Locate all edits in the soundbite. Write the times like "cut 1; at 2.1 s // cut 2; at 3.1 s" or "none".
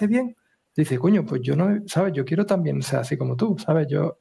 none